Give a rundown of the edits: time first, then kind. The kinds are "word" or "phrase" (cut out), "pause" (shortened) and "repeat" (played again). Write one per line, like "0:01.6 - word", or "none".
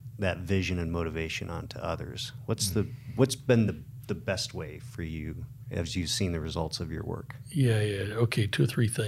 none